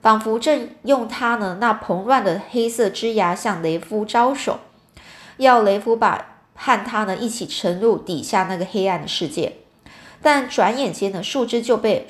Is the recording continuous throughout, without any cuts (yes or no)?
yes